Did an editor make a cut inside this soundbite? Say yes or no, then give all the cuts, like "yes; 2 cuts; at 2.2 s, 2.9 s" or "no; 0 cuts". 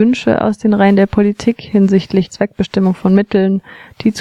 yes; 1 cut; at 2.3 s